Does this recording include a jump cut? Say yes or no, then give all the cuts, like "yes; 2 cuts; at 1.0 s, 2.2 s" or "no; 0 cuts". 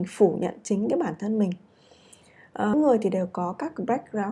no; 0 cuts